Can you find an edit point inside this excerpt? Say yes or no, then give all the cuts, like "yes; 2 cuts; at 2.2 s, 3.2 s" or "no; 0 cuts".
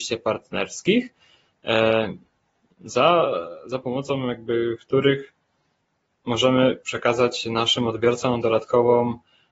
no; 0 cuts